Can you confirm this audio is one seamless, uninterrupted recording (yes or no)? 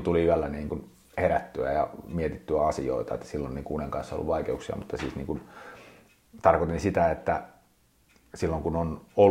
yes